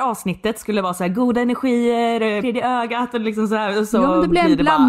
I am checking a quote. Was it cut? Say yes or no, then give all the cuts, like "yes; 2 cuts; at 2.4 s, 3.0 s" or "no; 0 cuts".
yes; 1 cut; at 2.4 s